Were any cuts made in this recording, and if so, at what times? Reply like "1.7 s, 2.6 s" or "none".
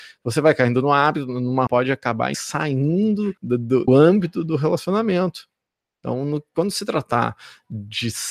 1.7 s, 2.3 s, 3.4 s, 3.9 s